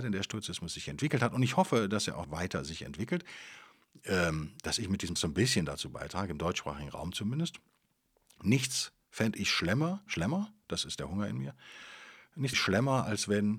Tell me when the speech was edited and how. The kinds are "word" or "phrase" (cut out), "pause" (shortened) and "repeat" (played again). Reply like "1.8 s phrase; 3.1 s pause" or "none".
2.2 s word; 5.2 s word; 10.1 s word; 12.5 s word